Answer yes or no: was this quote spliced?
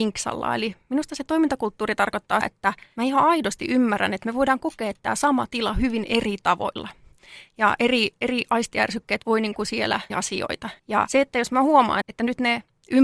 yes